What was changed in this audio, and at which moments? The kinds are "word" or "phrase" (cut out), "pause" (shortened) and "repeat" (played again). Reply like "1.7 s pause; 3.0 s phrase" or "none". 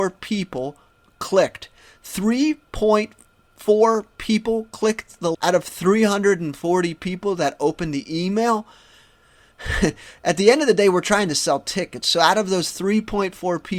5.3 s word